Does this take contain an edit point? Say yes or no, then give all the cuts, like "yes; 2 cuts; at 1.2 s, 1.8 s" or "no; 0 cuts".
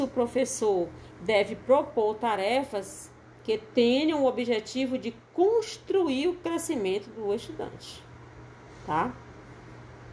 no; 0 cuts